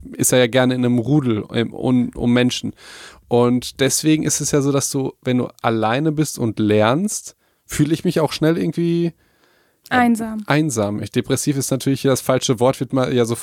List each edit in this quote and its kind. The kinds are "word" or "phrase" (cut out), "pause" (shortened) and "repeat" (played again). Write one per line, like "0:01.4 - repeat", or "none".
none